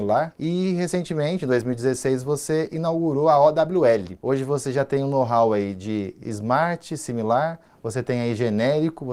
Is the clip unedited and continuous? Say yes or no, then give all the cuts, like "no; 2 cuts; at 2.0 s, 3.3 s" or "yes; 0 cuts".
yes; 0 cuts